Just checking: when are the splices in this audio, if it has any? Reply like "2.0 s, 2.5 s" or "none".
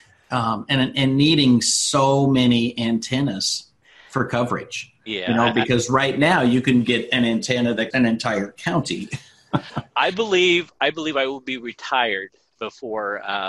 7.9 s